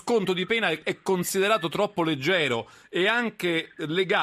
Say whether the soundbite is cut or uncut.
uncut